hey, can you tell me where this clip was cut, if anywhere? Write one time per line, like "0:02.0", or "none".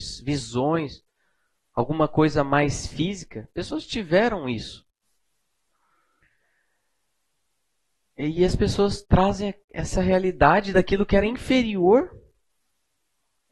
none